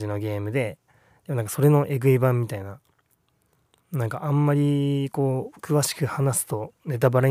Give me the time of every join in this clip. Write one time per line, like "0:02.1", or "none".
none